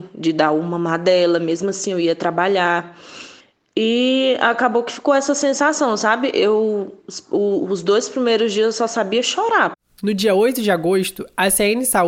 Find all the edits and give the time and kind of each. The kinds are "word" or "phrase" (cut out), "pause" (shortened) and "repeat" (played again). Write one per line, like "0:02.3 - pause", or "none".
0:03.4 - pause